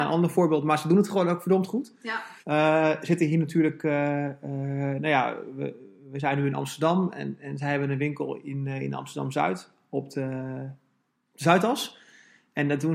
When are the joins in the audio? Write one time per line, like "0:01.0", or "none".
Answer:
0:02.4

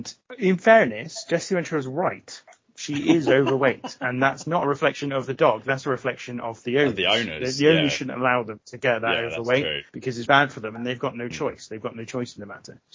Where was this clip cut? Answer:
0:09.9
0:10.3

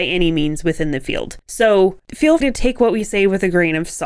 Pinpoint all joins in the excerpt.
0:01.4
0:02.4

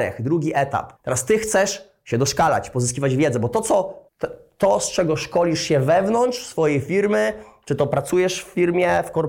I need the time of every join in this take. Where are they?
0:01.0
0:04.1

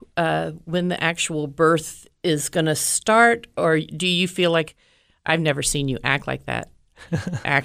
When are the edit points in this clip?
none

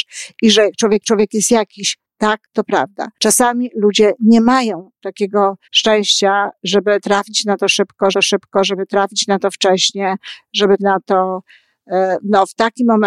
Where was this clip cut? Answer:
0:01.0
0:02.4
0:03.1
0:05.6
0:08.1
0:10.8

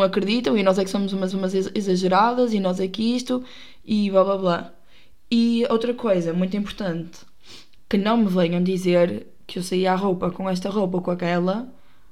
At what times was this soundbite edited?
0:01.3

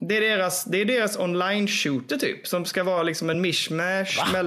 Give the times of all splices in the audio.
none

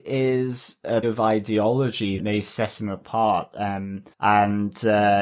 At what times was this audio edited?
0:01.0
0:02.2
0:04.1

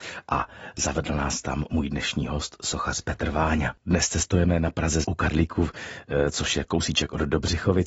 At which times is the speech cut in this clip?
0:03.8
0:05.0

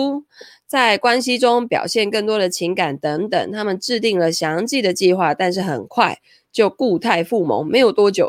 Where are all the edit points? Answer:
none

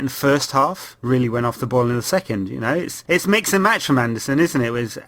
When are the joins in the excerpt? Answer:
none

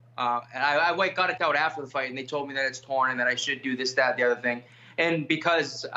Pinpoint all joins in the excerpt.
0:01.4

